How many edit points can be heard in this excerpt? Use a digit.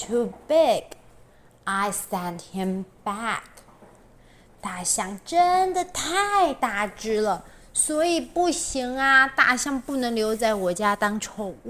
0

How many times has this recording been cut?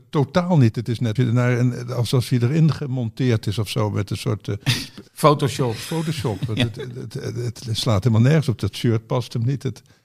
2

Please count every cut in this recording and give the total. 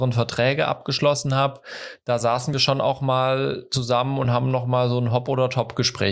0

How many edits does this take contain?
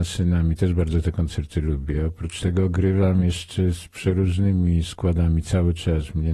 0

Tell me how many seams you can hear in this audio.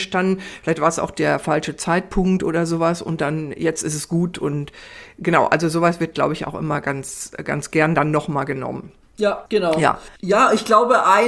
2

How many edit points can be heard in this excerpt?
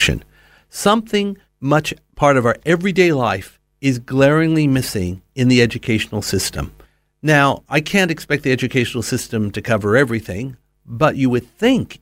2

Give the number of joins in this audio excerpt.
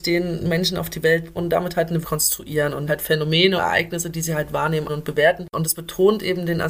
5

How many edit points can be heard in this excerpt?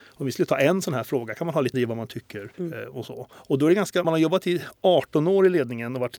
3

